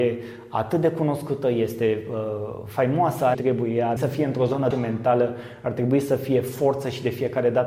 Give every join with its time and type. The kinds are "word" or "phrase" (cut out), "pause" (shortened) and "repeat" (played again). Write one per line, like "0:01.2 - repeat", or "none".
0:03.3 - phrase
0:04.0 - word
0:04.7 - phrase